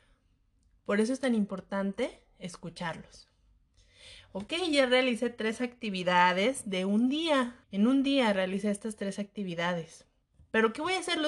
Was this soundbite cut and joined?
yes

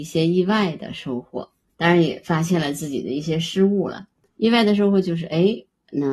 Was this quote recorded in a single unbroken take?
no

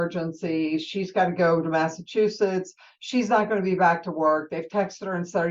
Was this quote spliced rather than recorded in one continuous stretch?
no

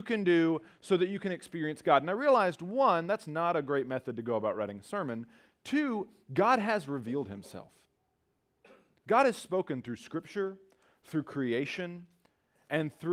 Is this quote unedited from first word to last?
yes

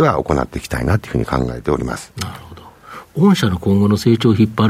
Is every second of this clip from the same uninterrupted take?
yes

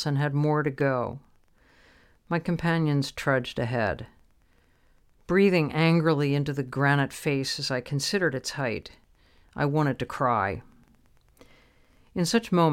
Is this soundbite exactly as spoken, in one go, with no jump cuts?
yes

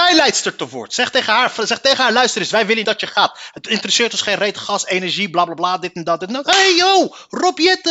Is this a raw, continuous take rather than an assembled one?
no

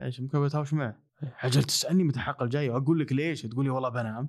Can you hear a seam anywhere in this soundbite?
yes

